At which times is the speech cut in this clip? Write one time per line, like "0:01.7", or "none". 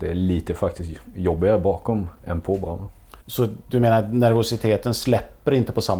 0:03.2